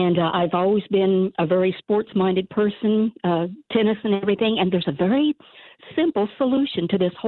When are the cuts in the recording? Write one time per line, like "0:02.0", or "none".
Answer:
0:03.7